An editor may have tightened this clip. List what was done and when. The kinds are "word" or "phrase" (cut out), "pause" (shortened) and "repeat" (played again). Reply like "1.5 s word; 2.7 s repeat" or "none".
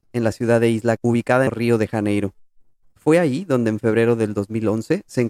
1.0 s word; 1.5 s phrase